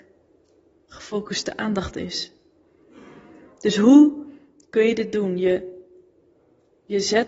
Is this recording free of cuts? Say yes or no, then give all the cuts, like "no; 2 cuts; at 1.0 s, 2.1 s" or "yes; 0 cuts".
yes; 0 cuts